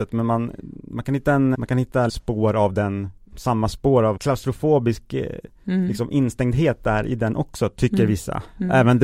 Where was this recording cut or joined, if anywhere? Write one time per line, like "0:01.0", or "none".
0:01.5
0:02.1
0:03.3
0:04.2